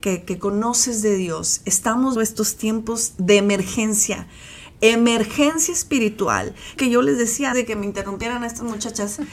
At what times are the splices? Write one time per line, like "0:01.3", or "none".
0:02.2
0:06.8
0:07.5

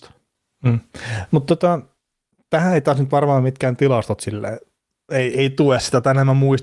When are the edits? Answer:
none

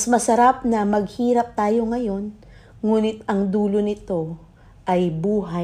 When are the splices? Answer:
none

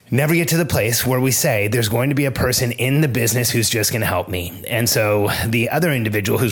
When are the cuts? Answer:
none

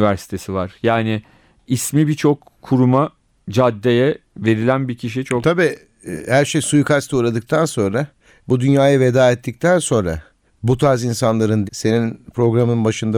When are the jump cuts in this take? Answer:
0:11.7

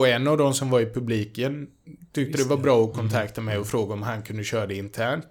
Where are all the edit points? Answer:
none

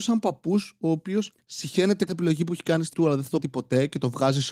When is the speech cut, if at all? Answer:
0:02.1
0:02.9
0:03.4

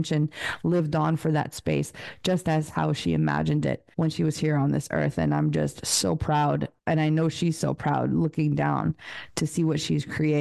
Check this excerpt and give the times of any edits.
0:03.9
0:06.8

